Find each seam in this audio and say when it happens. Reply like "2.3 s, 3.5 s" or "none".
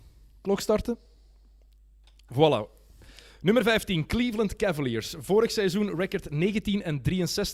none